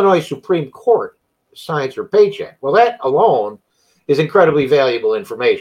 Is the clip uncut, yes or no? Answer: yes